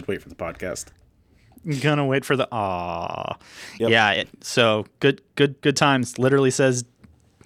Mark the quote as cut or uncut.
cut